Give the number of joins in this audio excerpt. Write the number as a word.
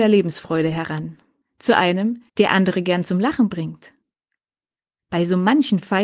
two